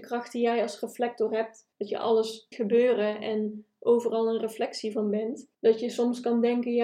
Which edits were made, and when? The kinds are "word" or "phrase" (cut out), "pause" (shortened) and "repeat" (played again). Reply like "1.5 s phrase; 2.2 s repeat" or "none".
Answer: 1.7 s pause; 2.5 s word; 5.5 s pause

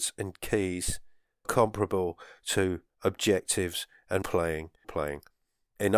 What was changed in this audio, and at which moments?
1.4 s word; 2.9 s pause; 4.2 s word; 4.8 s phrase

